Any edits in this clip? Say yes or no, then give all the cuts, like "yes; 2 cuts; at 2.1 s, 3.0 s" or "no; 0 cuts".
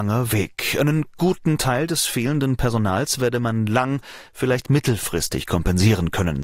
no; 0 cuts